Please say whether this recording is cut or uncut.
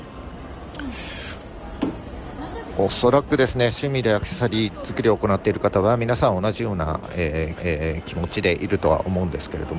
cut